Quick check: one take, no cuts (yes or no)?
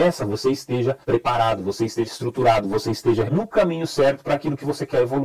no